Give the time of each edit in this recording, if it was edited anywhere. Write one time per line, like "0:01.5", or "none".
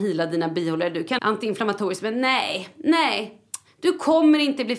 0:01.2